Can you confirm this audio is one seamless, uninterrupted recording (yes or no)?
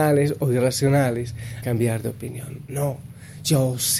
no